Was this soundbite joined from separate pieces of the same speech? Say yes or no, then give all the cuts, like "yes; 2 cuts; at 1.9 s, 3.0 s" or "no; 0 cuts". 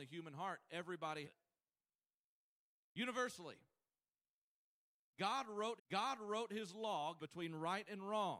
yes; 3 cuts; at 1.2 s, 5.8 s, 7.2 s